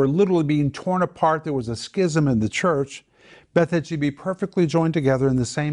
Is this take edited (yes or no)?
no